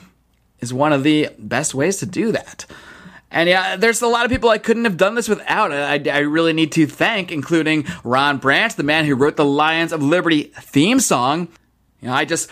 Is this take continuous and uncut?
yes; 0 cuts

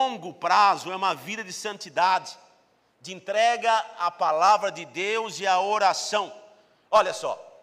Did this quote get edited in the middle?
no; 0 cuts

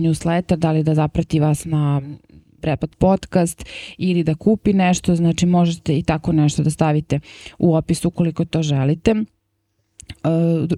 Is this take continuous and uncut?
no; 2 cuts; at 2.6 s, 2.9 s

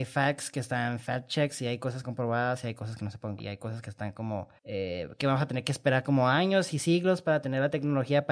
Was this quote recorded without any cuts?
no; 3 cuts; at 2.0 s, 3.4 s, 4.6 s

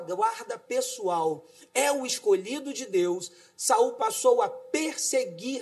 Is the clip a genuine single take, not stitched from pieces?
yes; 0 cuts

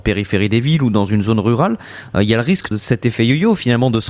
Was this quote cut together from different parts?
yes; 1 cut; at 2.7 s

